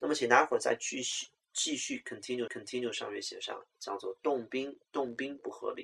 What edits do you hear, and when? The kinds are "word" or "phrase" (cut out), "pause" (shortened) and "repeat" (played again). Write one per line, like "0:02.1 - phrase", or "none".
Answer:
0:02.5 - repeat
0:04.9 - pause